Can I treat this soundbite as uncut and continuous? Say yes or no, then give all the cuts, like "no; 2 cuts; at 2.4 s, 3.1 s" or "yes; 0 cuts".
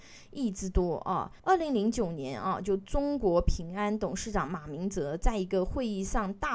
no; 1 cut; at 1.4 s